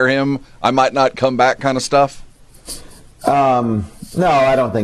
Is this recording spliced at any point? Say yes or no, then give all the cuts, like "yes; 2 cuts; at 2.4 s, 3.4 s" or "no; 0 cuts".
no; 0 cuts